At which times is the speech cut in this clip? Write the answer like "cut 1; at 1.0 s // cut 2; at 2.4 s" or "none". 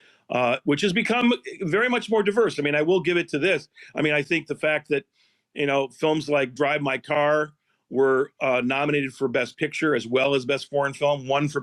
none